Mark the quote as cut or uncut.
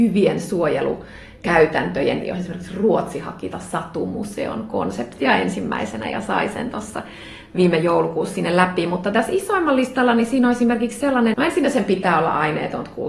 cut